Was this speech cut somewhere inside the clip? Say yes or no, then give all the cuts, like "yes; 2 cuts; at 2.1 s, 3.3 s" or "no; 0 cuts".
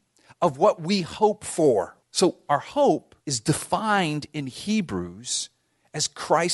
yes; 2 cuts; at 2.0 s, 3.2 s